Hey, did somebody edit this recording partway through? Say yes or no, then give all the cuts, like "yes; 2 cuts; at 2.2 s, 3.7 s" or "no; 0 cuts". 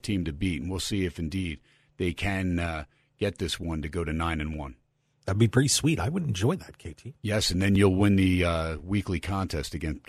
no; 0 cuts